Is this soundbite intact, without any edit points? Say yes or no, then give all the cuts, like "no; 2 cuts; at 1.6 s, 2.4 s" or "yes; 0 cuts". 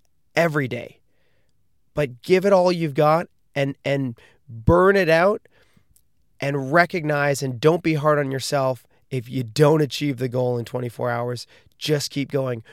yes; 0 cuts